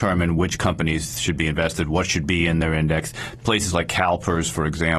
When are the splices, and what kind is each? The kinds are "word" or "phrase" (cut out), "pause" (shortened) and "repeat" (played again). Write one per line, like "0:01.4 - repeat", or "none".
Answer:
none